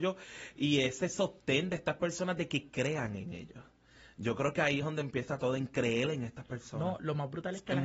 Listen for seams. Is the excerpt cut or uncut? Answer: uncut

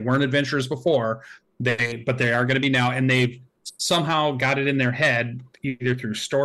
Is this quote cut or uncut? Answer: uncut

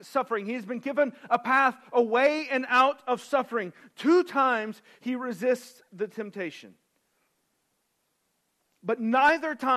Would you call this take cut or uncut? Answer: uncut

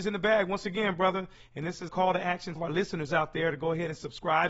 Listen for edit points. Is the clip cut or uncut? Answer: cut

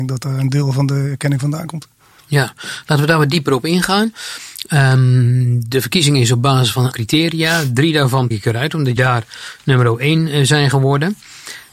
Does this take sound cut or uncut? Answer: cut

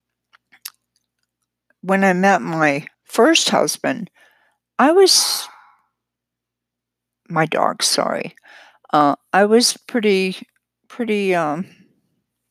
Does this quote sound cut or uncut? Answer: cut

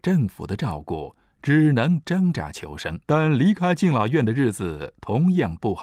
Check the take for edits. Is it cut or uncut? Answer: cut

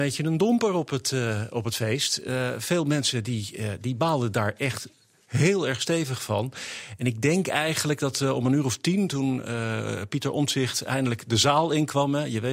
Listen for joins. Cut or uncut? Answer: uncut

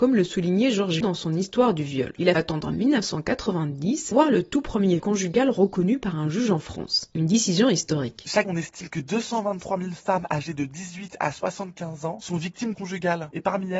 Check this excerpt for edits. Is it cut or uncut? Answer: cut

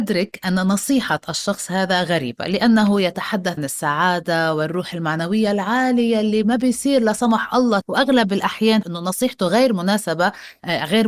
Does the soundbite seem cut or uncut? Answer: cut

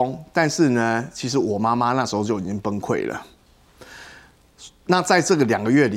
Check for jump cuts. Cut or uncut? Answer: uncut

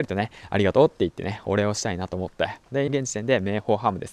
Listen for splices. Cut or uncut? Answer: cut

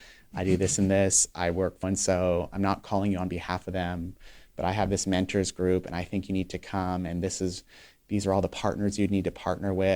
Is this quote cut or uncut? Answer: cut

